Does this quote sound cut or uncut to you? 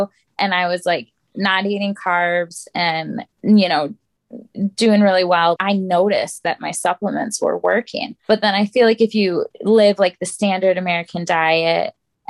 cut